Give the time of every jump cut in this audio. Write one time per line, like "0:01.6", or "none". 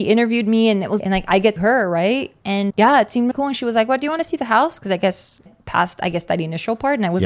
0:01.0
0:01.6
0:02.7
0:03.3
0:05.5